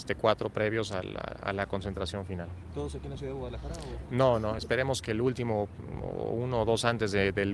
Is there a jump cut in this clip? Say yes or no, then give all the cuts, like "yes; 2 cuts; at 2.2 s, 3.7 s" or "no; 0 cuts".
no; 0 cuts